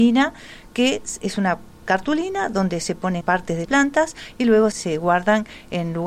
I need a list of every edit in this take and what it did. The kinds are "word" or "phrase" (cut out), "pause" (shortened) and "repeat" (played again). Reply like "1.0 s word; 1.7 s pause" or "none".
3.2 s phrase; 3.6 s word; 4.7 s word